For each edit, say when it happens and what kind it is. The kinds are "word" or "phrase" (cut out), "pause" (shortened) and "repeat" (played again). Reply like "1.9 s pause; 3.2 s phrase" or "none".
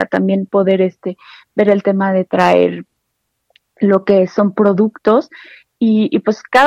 none